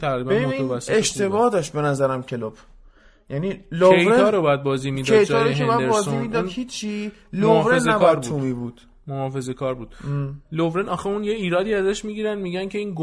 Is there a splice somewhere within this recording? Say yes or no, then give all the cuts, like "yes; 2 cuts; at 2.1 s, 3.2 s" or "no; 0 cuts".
no; 0 cuts